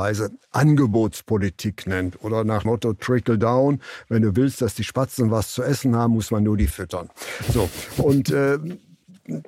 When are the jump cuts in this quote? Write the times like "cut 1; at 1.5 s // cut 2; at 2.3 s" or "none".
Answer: cut 1; at 2.6 s // cut 2; at 6.7 s